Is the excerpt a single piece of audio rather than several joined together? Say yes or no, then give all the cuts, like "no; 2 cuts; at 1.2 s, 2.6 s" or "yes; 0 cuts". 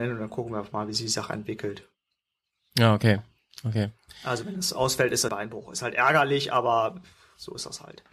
no; 1 cut; at 5.3 s